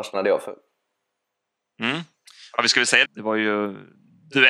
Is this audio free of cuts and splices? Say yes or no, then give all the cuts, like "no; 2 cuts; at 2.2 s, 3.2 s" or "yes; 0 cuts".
no; 1 cut; at 3.0 s